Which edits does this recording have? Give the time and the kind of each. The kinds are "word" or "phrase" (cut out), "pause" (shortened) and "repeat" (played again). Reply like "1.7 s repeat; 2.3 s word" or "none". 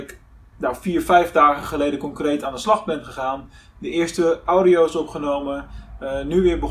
none

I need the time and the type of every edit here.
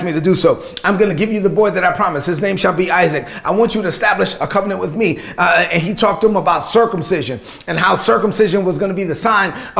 none

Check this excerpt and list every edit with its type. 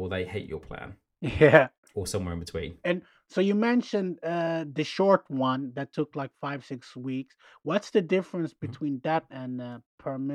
9.3 s word

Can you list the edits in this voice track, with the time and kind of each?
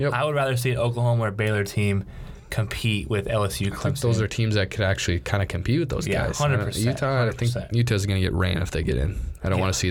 none

